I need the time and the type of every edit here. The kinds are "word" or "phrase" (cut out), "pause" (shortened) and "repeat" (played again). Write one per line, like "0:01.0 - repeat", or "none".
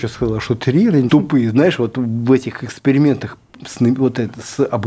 0:01.1 - phrase